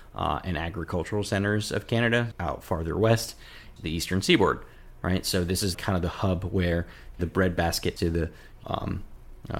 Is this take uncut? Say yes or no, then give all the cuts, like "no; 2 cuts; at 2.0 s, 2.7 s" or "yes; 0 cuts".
no; 6 cuts; at 2.3 s, 3.8 s, 5.7 s, 7.2 s, 8.0 s, 8.6 s